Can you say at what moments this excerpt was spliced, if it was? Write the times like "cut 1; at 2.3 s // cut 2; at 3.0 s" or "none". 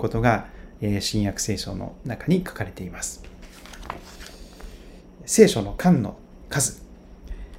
none

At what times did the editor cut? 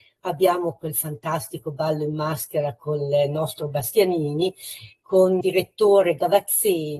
cut 1; at 5.4 s

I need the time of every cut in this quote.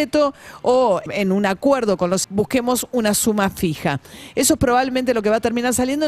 cut 1; at 1.1 s // cut 2; at 2.2 s

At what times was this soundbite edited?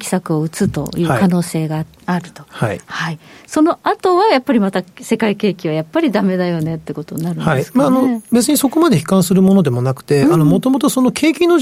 none

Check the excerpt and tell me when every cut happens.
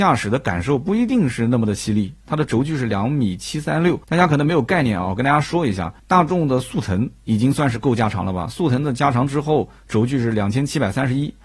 cut 1; at 4.0 s // cut 2; at 6.0 s

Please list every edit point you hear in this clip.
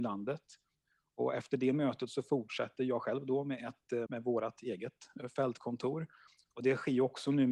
cut 1; at 4.1 s

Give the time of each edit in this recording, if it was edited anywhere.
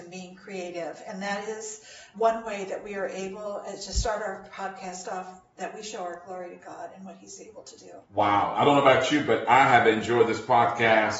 cut 1; at 2.1 s // cut 2; at 8.0 s

